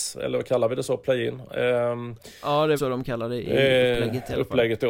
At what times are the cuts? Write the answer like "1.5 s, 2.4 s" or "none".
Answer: 2.8 s